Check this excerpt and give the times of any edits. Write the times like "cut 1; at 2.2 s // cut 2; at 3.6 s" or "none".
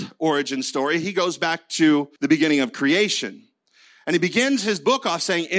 cut 1; at 2.2 s